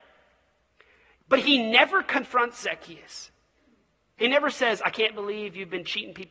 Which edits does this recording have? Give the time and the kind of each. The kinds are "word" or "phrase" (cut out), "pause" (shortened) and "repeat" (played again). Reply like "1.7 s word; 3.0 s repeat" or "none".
none